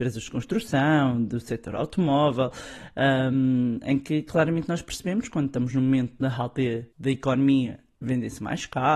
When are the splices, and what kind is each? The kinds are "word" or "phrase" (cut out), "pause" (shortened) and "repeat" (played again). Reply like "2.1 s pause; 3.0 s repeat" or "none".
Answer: 6.9 s pause